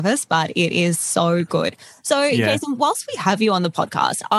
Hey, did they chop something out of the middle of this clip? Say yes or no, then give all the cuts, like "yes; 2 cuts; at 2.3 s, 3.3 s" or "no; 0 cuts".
no; 0 cuts